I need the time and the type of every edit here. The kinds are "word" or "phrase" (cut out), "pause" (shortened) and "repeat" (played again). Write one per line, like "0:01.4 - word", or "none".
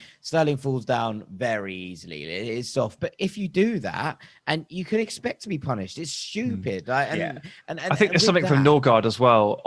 0:03.0 - word